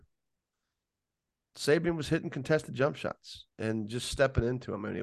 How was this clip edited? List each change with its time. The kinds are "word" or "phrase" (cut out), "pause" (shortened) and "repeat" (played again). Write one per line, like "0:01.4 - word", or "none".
0:03.5 - pause